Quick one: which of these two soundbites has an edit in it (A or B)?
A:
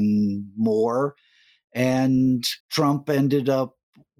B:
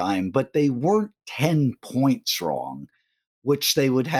A